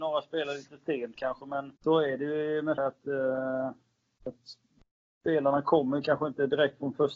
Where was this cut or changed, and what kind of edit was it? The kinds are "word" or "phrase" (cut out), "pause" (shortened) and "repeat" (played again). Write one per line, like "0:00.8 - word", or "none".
0:01.8 - pause
0:02.8 - word